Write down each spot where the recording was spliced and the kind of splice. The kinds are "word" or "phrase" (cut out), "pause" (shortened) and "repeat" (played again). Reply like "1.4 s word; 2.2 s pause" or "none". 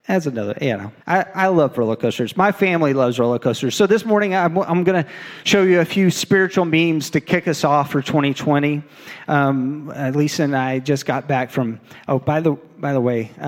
1.0 s pause